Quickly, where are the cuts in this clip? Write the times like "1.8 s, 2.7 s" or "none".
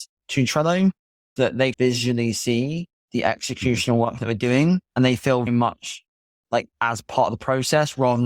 1.4 s, 1.7 s, 4.9 s, 5.5 s